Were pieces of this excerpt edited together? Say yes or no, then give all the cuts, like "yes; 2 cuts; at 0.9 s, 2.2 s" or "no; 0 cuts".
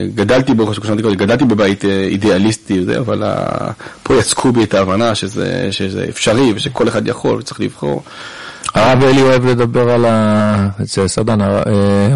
no; 0 cuts